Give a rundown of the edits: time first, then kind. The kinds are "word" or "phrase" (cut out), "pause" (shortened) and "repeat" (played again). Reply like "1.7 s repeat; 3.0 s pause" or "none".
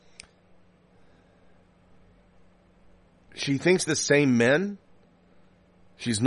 3.9 s phrase